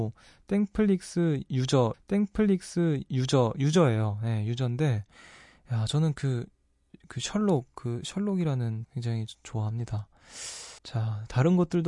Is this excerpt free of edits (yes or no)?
no